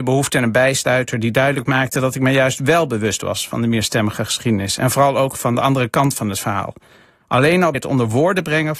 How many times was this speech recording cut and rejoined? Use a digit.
1